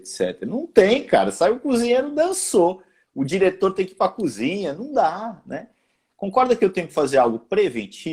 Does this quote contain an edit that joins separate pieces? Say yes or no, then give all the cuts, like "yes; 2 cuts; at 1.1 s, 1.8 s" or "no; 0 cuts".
no; 0 cuts